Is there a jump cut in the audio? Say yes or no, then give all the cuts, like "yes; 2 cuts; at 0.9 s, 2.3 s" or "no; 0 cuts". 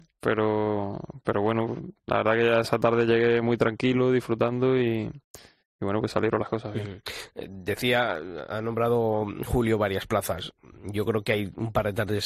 no; 0 cuts